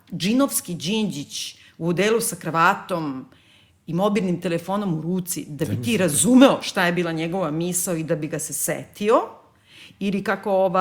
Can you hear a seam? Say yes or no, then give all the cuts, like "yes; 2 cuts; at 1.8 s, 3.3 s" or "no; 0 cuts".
no; 0 cuts